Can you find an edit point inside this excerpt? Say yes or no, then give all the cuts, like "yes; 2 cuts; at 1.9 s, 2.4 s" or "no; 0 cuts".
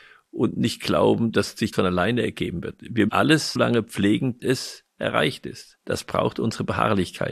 yes; 5 cuts; at 1.7 s, 3.1 s, 3.6 s, 4.4 s, 5.8 s